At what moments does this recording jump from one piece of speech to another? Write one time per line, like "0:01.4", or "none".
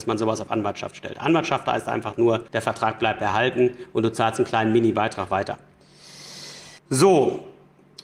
0:02.5
0:06.8